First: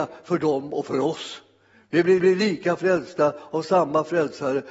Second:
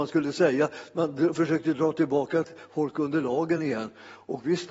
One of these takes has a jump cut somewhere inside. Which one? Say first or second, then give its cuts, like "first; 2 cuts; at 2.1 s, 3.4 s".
first; 1 cut; at 2.2 s